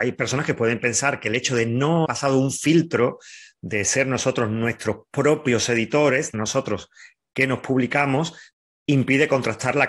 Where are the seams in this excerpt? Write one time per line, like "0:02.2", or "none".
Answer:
0:02.1
0:06.3